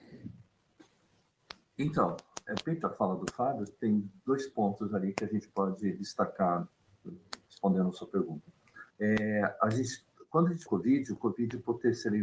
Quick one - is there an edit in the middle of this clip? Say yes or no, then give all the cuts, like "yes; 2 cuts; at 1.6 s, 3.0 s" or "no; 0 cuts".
yes; 5 cuts; at 2.5 s, 2.8 s, 7.4 s, 8.9 s, 10.7 s